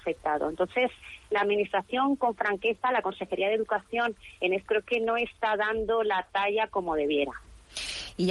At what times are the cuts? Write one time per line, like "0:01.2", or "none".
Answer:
0:04.7